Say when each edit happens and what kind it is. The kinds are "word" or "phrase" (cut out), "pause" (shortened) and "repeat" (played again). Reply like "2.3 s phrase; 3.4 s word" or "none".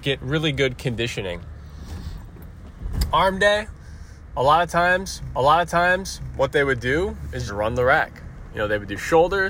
5.3 s repeat; 7.5 s word